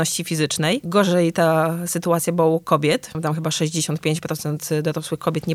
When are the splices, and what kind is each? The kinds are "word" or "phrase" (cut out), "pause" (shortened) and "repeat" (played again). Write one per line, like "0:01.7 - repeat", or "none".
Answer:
none